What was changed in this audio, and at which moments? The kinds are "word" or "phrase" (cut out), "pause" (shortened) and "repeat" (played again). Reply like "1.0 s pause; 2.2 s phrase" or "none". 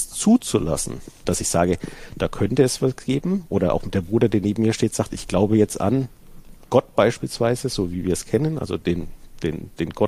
1.2 s word